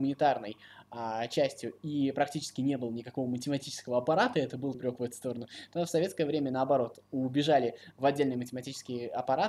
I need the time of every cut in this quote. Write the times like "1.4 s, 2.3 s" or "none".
4.7 s

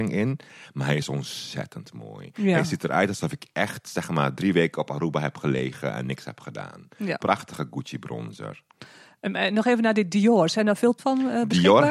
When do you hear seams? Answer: 11.0 s

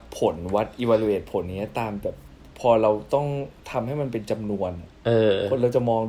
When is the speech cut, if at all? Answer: none

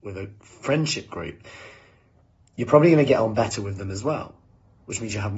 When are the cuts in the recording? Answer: none

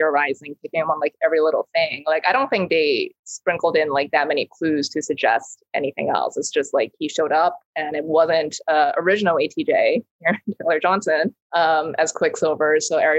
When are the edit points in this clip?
11.4 s

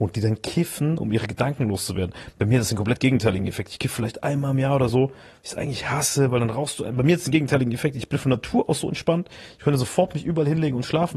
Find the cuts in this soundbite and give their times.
none

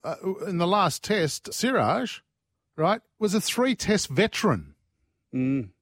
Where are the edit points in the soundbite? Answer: 1.5 s

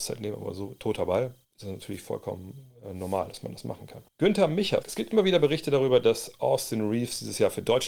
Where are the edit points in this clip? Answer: 1.4 s, 4.1 s, 4.8 s

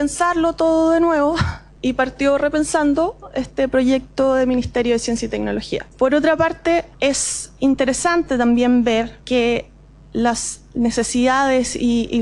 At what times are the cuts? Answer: 5.9 s, 6.9 s, 9.2 s

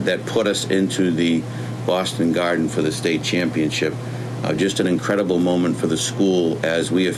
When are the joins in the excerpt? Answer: none

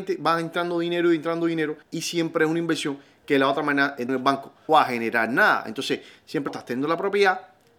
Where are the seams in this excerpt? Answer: 1.8 s, 4.1 s, 4.7 s, 6.5 s

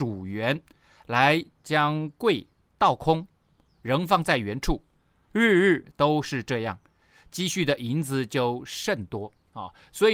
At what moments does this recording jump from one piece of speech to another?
none

